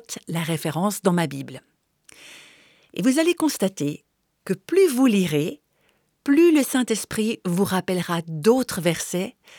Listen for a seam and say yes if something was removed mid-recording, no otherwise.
no